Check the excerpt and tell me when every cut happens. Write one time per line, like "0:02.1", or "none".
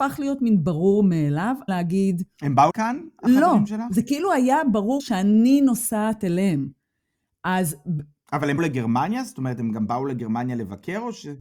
0:01.7
0:02.7
0:05.0
0:08.6